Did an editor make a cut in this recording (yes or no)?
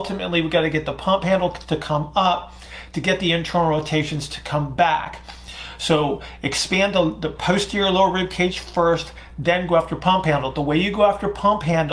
no